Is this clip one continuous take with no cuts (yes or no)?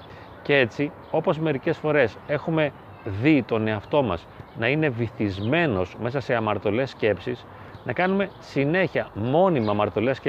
yes